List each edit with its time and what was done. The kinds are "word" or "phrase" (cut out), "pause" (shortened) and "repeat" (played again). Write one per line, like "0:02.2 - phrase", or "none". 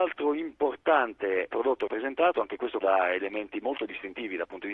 0:01.5 - word
0:01.9 - word
0:02.8 - word